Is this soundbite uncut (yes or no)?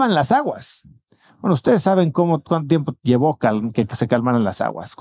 yes